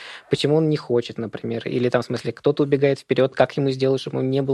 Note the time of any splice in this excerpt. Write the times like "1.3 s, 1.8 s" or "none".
none